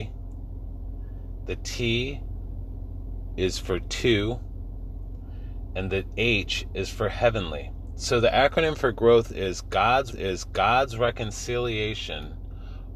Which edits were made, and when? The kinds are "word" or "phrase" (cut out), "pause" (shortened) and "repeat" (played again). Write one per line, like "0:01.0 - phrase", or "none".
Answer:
0:10.1 - repeat